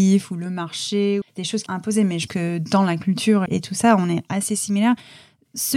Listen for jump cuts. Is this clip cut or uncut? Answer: cut